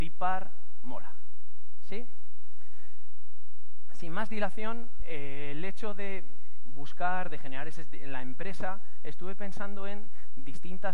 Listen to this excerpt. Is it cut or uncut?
uncut